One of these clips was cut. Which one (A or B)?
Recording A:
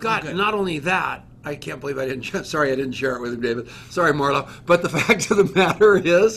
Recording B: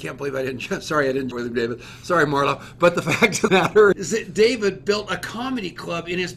B